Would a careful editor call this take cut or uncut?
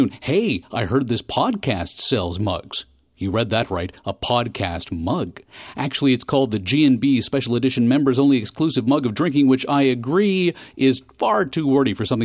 uncut